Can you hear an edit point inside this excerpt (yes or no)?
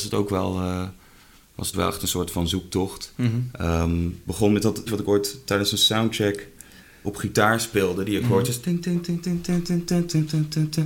yes